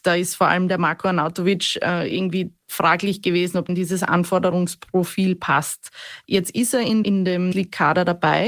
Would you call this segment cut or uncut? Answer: cut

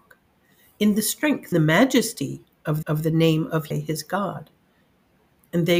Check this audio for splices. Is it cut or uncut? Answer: cut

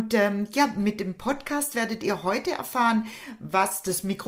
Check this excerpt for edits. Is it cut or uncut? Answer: uncut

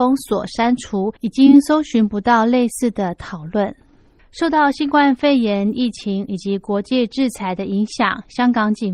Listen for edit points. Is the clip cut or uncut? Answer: cut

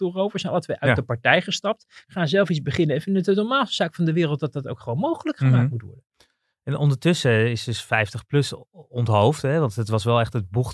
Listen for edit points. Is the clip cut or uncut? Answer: uncut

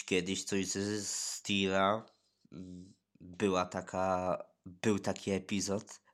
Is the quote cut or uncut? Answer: uncut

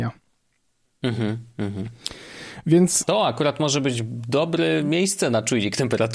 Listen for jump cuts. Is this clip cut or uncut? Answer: uncut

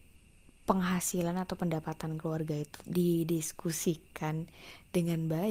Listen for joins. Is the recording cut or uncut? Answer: cut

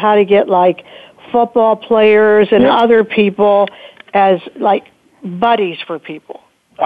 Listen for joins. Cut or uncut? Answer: uncut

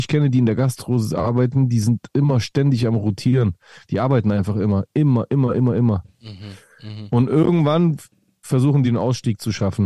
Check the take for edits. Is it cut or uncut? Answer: uncut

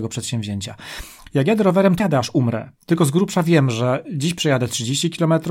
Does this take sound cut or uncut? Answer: cut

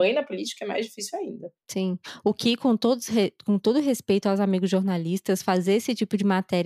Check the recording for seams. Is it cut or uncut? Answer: cut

